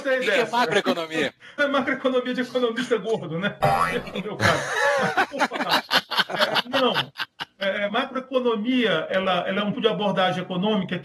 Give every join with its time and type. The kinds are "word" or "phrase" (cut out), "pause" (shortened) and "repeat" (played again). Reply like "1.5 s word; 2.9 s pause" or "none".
1.6 s word; 7.9 s word; 9.1 s word; 9.7 s word